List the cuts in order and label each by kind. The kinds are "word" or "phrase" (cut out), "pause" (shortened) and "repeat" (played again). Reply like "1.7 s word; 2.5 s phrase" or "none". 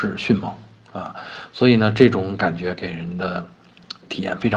none